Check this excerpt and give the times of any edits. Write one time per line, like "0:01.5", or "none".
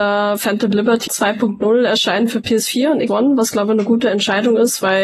0:01.1
0:03.1